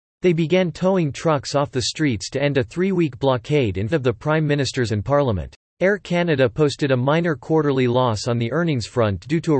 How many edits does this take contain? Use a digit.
3